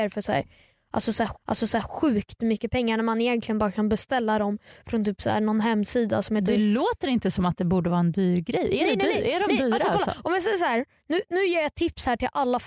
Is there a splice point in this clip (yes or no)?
yes